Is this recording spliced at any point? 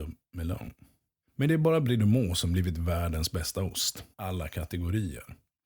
yes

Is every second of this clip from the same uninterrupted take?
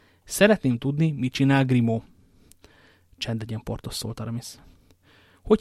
yes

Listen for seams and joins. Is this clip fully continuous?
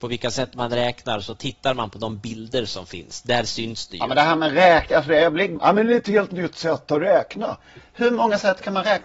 yes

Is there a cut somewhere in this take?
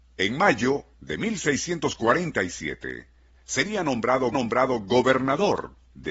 yes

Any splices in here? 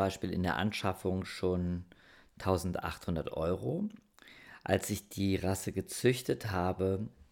no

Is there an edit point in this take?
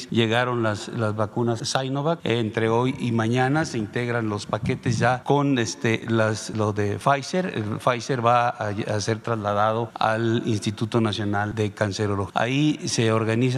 no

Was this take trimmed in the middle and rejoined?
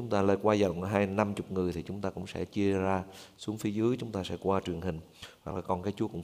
no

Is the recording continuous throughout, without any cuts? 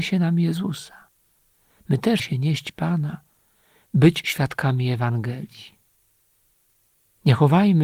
no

